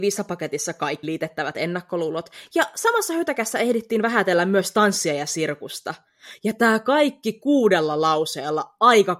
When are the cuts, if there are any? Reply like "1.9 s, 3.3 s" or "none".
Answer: 1.0 s

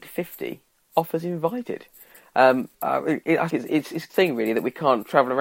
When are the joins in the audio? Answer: 2.7 s, 3.5 s, 4.1 s

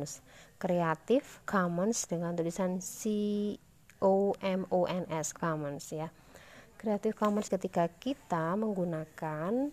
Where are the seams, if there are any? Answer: 1.4 s, 4.4 s, 5.3 s, 7.5 s

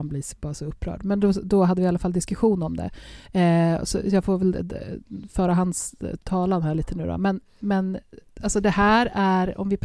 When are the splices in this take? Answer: none

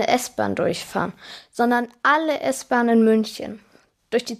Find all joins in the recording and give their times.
none

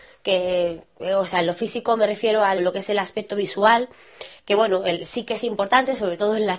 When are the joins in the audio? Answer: 2.6 s

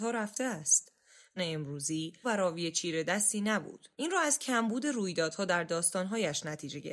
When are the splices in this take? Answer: 1.4 s, 2.2 s, 3.9 s

